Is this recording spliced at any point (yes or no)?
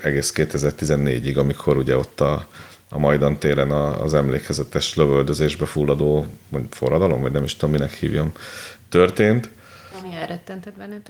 no